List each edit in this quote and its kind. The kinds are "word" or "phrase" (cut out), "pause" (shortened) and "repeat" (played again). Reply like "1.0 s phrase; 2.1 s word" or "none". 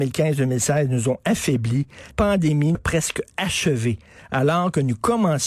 2.1 s word; 2.7 s word